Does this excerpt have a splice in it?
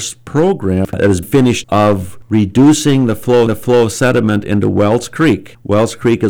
yes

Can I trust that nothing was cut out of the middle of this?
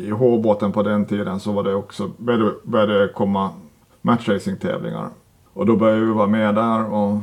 yes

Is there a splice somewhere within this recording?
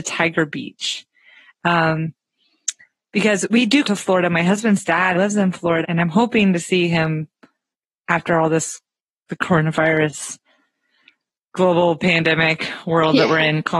yes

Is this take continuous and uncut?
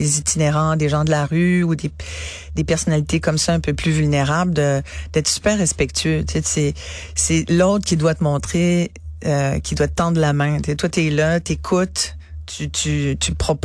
yes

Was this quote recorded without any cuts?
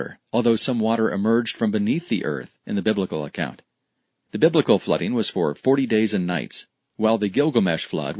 yes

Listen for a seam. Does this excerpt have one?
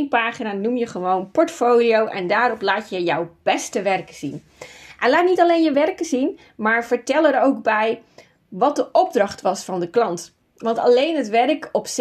no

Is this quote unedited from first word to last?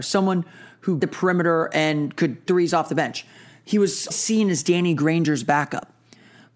no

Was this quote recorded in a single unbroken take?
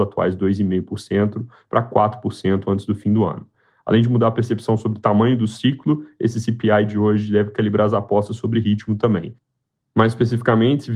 yes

